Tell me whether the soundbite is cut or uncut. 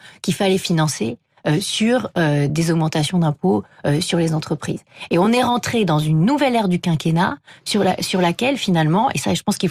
uncut